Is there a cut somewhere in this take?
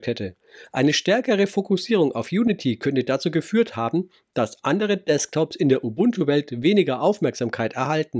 no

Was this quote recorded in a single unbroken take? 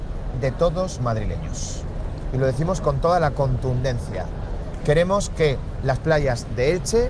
no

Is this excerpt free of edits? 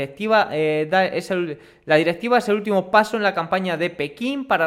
yes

